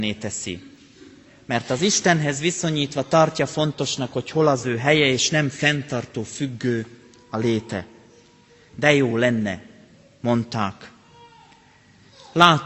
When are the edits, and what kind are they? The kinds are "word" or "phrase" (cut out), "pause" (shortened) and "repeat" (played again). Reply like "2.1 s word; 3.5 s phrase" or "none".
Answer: none